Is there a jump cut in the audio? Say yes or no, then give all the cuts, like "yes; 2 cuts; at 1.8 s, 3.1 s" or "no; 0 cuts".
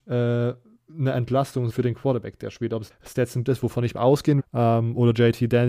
yes; 4 cuts; at 1.7 s, 2.9 s, 3.5 s, 4.4 s